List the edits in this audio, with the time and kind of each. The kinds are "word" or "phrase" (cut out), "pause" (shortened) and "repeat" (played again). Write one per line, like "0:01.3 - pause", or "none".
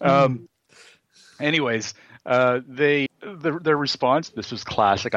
0:03.1 - word